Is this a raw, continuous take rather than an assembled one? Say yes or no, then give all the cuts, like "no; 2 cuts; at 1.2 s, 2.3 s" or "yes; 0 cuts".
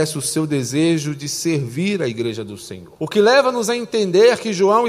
no; 1 cut; at 3.0 s